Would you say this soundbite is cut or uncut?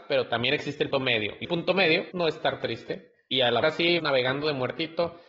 cut